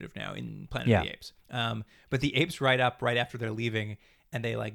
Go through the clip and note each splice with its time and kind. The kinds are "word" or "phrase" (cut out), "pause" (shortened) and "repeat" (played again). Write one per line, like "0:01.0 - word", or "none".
0:01.4 - pause